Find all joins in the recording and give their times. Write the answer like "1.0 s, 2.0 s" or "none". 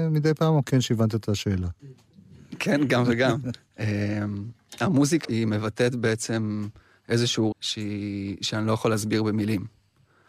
1.8 s, 5.2 s, 7.5 s